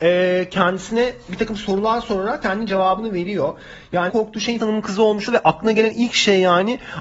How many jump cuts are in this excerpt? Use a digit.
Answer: 4